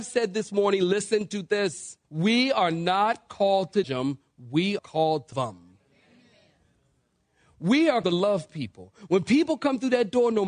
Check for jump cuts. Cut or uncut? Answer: cut